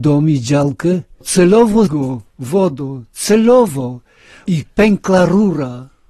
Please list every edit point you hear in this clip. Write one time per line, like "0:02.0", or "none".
0:01.2
0:01.9